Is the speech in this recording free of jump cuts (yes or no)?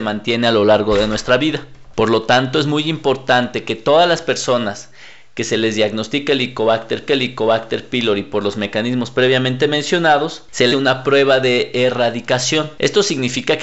no